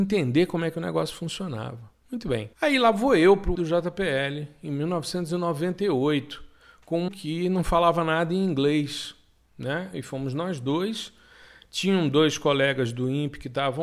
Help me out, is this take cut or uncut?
cut